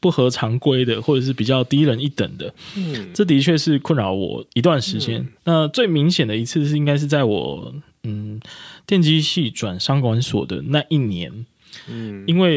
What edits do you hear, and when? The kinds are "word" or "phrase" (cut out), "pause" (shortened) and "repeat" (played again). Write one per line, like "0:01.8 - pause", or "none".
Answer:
0:04.5 - pause
0:05.4 - pause